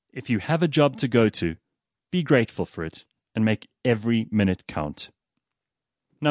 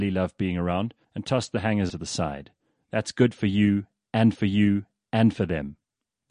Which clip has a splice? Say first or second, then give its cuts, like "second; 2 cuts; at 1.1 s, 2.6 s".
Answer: second; 3 cuts; at 1.0 s, 1.9 s, 4.4 s